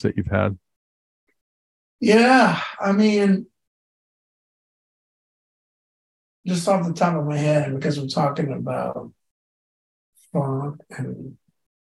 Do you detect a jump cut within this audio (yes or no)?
no